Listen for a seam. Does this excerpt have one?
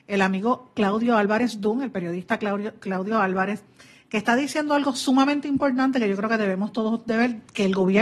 no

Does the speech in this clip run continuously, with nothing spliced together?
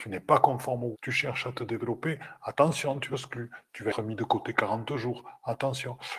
no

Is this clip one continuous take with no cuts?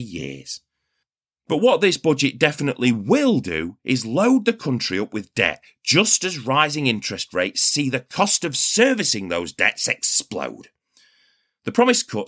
yes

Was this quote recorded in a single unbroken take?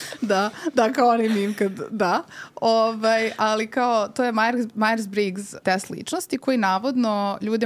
no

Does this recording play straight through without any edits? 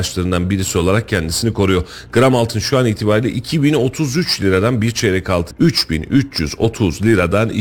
no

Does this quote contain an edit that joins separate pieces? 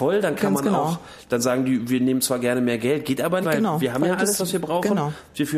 yes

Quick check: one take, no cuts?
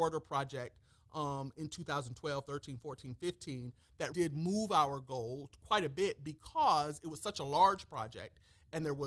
no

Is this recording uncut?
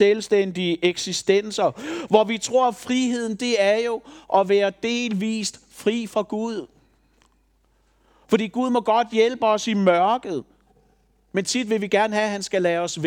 yes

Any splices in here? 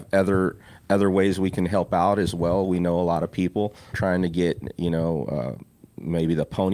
yes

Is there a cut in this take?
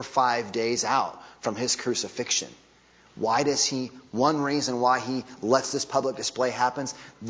no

